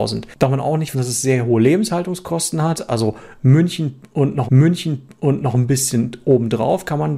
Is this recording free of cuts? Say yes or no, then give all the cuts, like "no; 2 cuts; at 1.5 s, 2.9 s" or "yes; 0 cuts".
no; 2 cuts; at 0.9 s, 4.5 s